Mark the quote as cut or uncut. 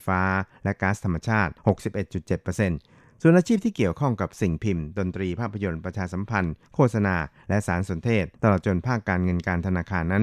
cut